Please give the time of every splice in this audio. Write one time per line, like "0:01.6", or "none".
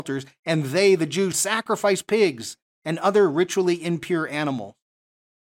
0:01.3